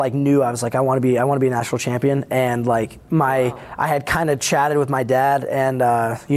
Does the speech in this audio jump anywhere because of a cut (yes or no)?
no